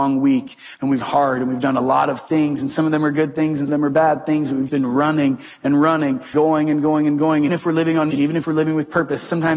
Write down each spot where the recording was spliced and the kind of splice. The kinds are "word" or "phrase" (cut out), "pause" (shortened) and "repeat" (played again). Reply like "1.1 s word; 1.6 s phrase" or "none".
1.0 s word; 3.7 s word; 4.7 s word; 6.3 s word; 7.5 s word; 8.1 s word